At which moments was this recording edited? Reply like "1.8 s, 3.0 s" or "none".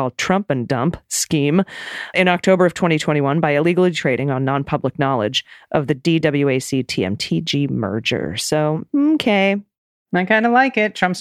2.1 s

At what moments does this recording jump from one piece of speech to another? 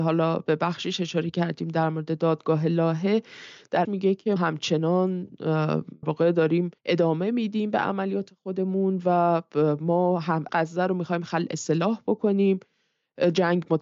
3.8 s, 4.4 s, 6.0 s, 6.8 s, 10.5 s

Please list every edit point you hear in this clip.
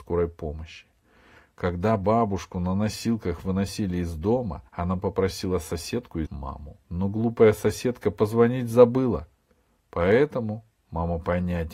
4.7 s, 6.3 s, 6.8 s

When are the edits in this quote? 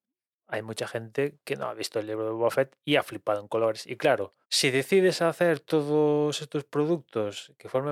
4.4 s

